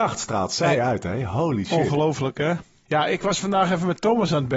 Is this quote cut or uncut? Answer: uncut